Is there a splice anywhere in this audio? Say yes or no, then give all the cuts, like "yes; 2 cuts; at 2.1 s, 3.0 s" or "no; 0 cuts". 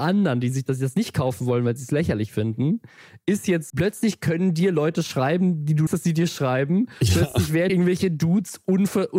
yes; 3 cuts; at 3.7 s, 5.9 s, 7.7 s